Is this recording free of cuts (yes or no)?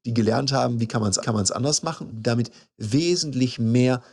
no